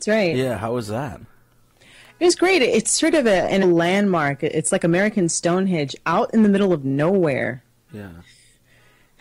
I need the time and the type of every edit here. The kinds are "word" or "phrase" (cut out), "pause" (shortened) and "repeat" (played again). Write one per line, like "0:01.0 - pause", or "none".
0:03.6 - word